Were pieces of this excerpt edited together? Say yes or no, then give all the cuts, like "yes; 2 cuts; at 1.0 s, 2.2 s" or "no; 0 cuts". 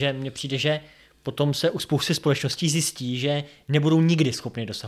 no; 0 cuts